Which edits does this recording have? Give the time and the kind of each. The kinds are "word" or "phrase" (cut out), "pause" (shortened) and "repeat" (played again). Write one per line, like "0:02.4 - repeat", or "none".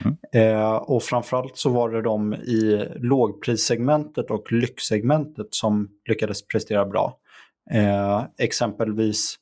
none